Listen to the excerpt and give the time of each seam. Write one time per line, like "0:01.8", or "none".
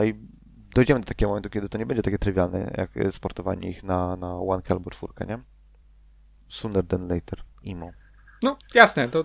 0:05.8